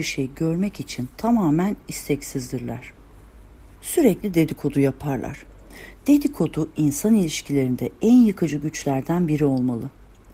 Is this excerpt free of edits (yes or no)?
no